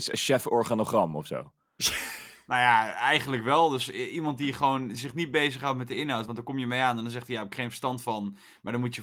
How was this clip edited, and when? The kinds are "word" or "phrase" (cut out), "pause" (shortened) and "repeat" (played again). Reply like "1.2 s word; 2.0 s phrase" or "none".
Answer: none